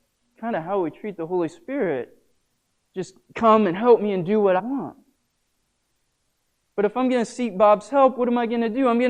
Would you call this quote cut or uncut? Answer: cut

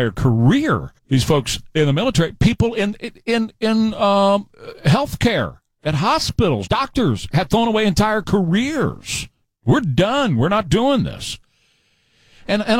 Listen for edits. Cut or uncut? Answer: cut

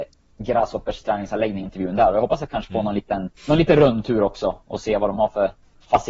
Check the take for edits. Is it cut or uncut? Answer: cut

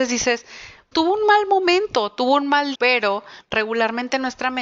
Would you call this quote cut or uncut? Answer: cut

